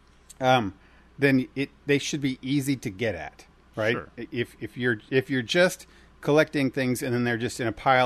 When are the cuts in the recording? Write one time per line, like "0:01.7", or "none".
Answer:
none